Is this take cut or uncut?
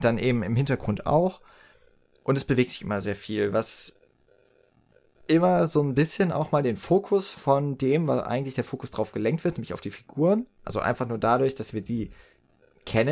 uncut